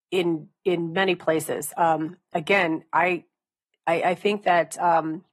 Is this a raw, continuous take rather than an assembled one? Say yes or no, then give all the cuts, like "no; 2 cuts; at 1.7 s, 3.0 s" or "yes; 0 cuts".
yes; 0 cuts